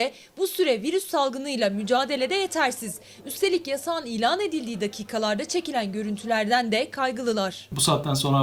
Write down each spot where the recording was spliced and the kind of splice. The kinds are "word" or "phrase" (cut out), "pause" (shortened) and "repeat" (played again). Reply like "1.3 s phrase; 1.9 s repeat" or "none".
none

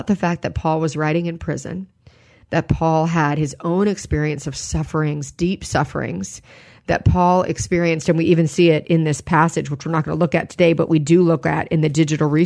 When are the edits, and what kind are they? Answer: none

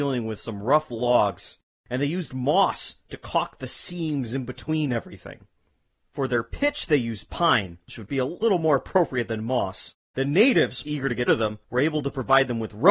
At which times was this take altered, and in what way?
10.0 s pause; 10.8 s word; 11.3 s word

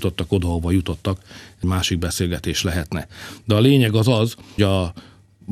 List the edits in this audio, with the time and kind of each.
1.6 s word; 4.6 s word

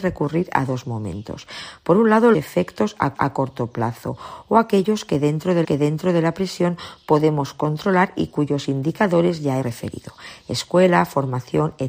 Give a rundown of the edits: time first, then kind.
2.3 s word; 3.1 s repeat; 5.6 s repeat; 9.6 s word

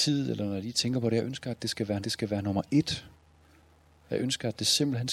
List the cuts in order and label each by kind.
2.0 s repeat

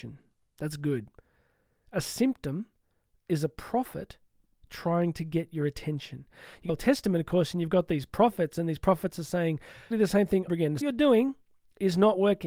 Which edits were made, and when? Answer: 6.7 s phrase; 9.9 s word; 10.5 s phrase; 10.8 s phrase

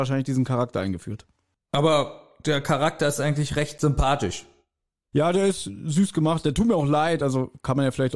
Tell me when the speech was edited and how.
none

